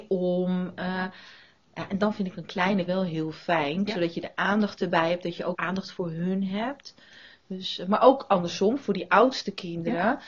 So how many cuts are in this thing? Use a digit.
2